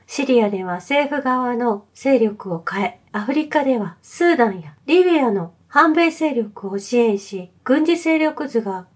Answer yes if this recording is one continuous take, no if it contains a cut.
no